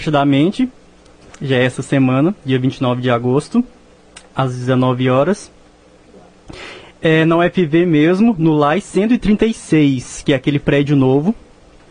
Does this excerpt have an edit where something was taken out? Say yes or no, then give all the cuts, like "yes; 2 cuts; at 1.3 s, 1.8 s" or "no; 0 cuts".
no; 0 cuts